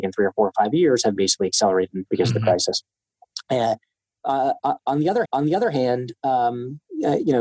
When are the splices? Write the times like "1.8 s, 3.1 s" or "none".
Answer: 1.2 s, 2.1 s, 5.2 s